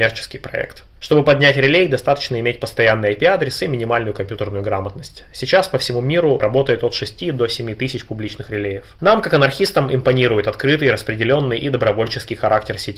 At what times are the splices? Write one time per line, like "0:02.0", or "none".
none